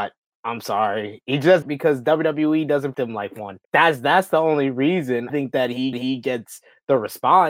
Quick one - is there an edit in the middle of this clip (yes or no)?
yes